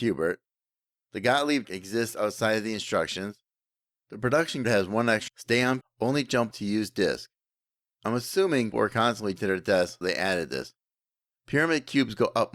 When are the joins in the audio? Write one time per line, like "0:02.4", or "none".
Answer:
0:01.6
0:04.6
0:05.3
0:05.8
0:06.5
0:08.7
0:09.4
0:10.0